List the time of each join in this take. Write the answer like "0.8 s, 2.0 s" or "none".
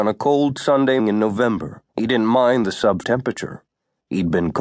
1.0 s, 1.9 s, 3.0 s